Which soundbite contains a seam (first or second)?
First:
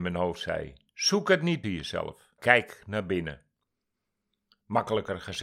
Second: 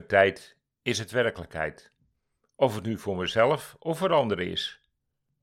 first